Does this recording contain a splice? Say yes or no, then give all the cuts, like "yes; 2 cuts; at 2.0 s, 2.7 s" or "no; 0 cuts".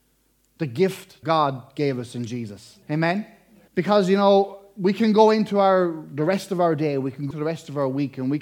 yes; 4 cuts; at 1.2 s, 2.8 s, 3.7 s, 7.3 s